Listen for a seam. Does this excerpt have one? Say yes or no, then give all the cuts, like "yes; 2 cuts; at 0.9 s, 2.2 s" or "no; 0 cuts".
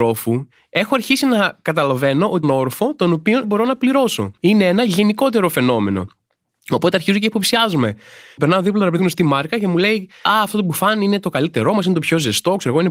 yes; 4 cuts; at 2.4 s, 3.4 s, 4.4 s, 9.0 s